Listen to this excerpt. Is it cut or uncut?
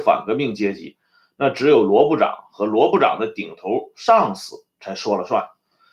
uncut